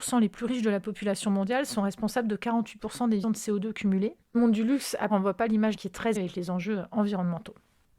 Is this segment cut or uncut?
cut